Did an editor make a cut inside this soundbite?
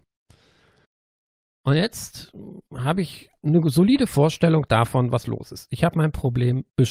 no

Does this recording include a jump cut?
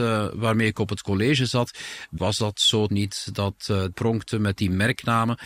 yes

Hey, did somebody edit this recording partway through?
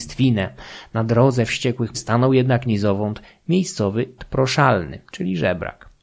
yes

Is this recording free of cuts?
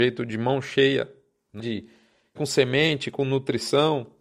no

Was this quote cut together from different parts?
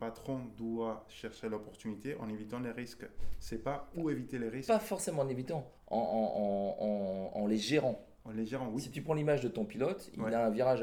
yes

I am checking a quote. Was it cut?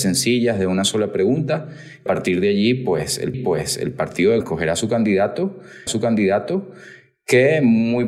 yes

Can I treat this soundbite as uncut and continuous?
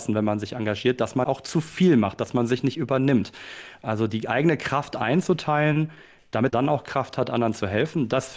no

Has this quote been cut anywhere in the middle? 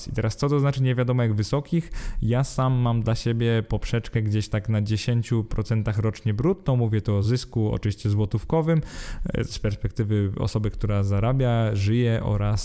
no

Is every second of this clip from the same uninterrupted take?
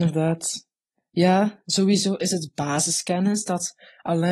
yes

